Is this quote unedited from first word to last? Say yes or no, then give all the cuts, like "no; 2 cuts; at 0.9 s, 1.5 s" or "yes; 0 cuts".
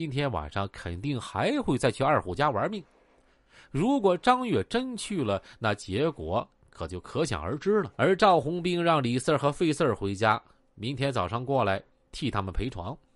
no; 1 cut; at 7.9 s